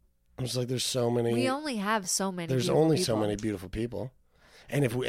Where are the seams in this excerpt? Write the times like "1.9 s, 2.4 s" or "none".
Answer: none

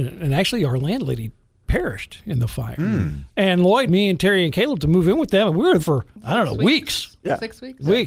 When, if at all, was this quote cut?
3.9 s, 5.8 s

